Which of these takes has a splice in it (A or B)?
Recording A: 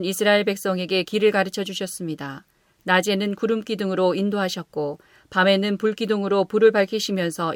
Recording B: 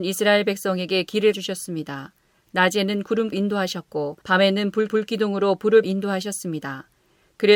B